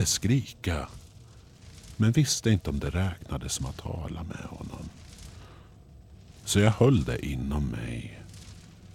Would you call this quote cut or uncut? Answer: uncut